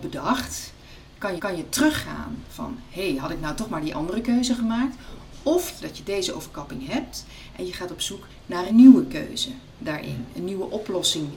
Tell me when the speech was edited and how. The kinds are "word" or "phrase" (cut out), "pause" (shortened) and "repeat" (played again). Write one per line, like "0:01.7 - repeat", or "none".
0:01.4 - repeat
0:05.8 - phrase
0:08.7 - word

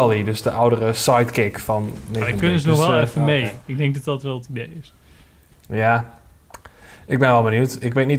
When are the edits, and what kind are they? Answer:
none

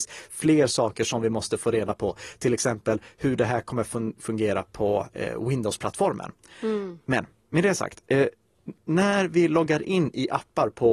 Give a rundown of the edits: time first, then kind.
none

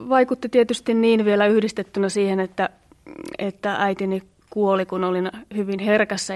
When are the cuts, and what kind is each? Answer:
none

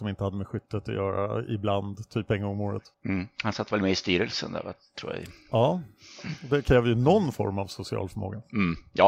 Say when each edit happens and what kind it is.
0:02.9 - pause

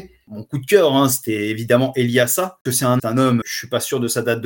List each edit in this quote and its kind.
0:02.7 - word
0:03.0 - phrase
0:03.4 - word

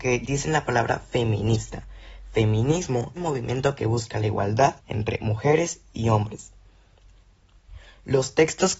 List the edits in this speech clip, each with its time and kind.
0:03.2 - phrase
0:04.8 - pause

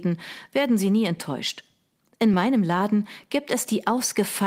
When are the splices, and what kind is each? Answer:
none

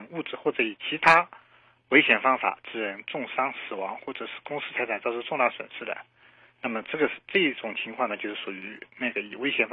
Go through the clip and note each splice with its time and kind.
none

